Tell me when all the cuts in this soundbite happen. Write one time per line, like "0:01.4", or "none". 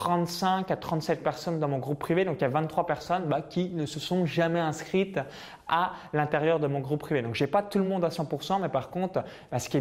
none